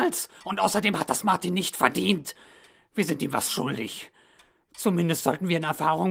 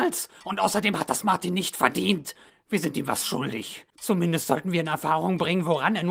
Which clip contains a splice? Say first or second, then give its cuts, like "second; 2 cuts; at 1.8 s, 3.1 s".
second; 2 cuts; at 2.5 s, 3.9 s